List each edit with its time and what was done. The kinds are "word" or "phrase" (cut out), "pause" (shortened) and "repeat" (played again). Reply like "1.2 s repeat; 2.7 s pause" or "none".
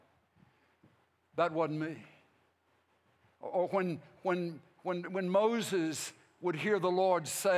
none